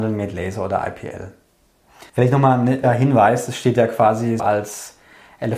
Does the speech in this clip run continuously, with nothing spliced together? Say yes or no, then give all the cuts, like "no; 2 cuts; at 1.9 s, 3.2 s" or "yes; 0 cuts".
no; 3 cuts; at 2.1 s, 2.8 s, 4.4 s